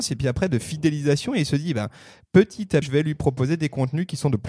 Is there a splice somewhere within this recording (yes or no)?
yes